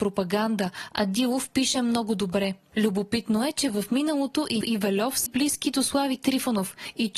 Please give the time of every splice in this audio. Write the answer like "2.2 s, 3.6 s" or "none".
4.6 s, 5.3 s